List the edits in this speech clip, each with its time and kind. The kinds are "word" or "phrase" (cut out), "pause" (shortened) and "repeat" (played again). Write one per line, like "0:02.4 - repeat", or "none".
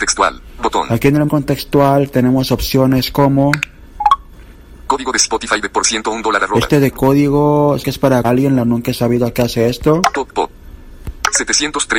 0:01.3 - word
0:07.8 - word
0:08.2 - word